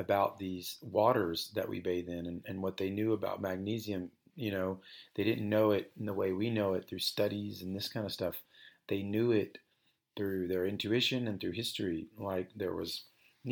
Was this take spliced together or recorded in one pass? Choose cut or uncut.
uncut